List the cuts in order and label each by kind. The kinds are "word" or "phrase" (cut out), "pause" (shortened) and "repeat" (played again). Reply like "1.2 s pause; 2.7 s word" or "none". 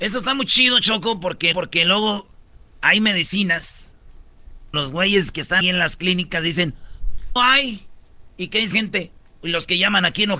1.5 s repeat; 4.7 s word; 5.6 s word; 7.4 s word; 8.7 s word